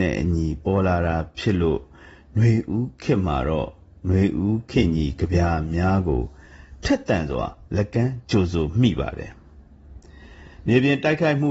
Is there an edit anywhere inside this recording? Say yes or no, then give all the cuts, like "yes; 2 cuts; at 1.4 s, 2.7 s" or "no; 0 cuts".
no; 0 cuts